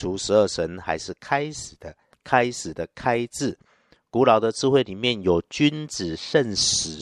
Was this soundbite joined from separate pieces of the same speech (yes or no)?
no